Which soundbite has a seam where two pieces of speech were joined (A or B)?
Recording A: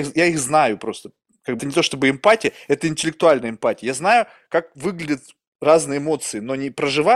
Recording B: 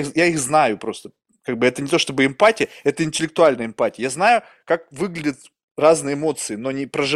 A